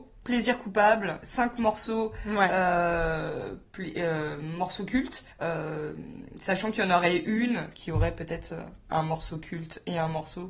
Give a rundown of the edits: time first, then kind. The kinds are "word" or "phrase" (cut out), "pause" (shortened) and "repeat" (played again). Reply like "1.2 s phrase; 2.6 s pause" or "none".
5.3 s pause